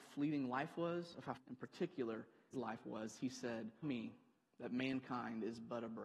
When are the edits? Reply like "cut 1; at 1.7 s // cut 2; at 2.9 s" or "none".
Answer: cut 1; at 1.4 s // cut 2; at 2.5 s // cut 3; at 3.8 s